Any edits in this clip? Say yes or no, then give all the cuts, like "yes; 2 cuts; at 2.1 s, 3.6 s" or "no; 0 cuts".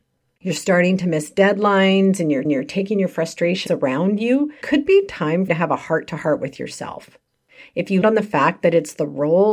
yes; 5 cuts; at 2.4 s, 3.7 s, 4.6 s, 5.5 s, 8.0 s